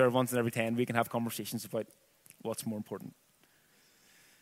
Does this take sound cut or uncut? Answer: uncut